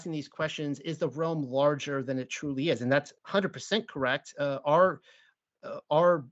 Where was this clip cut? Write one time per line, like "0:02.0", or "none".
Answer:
0:03.2